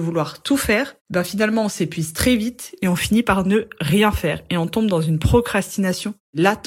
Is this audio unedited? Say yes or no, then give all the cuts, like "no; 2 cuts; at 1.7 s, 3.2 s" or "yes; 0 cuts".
yes; 0 cuts